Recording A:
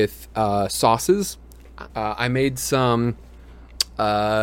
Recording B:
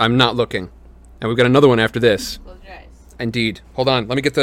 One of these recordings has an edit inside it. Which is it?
A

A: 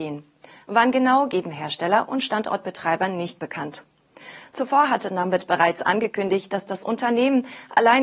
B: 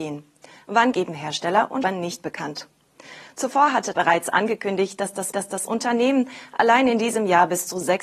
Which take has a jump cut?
B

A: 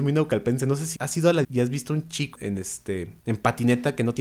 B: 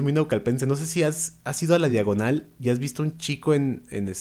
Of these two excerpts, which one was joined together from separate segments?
A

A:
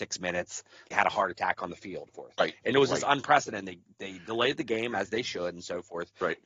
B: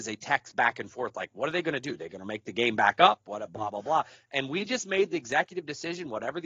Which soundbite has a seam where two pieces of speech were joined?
A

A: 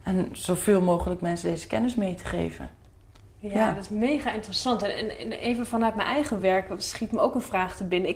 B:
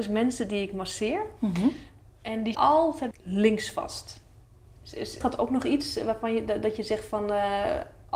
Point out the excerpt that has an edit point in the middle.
B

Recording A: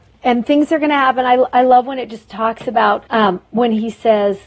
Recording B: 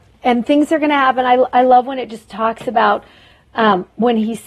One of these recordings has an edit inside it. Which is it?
A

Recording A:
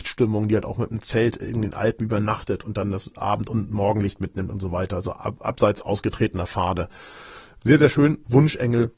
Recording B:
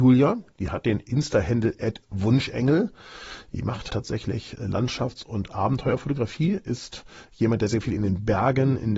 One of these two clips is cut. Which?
B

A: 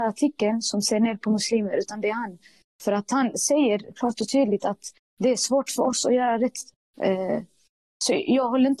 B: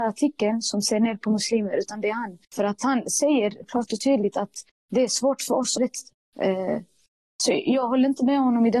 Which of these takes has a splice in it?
B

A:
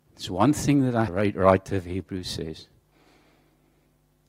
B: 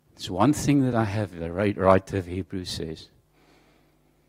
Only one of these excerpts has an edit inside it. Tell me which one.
A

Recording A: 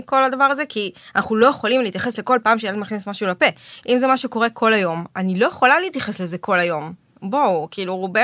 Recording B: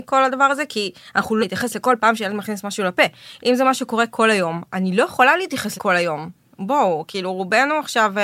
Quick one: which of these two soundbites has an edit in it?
B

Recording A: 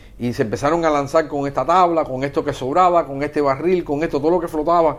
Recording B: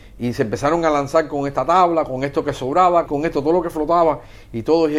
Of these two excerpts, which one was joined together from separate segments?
B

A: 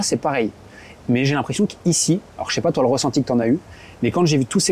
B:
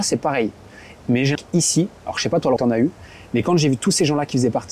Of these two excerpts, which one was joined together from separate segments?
B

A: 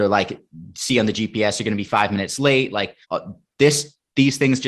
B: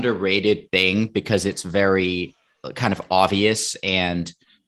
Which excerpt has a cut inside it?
A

